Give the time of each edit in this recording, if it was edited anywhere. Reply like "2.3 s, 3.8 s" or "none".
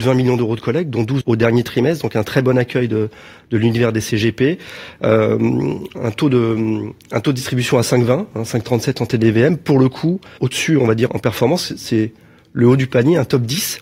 1.2 s, 5.9 s, 10.4 s, 11.1 s